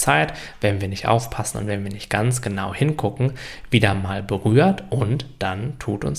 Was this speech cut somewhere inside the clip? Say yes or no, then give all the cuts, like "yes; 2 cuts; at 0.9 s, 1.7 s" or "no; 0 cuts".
no; 0 cuts